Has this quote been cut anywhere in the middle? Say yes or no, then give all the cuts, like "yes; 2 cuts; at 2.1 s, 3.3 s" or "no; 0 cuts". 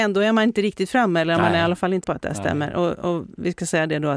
yes; 1 cut; at 2.0 s